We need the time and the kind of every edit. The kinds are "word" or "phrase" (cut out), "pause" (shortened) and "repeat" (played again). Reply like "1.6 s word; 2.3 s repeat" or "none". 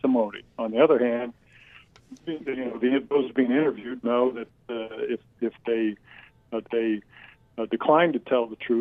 2.4 s word; 6.6 s repeat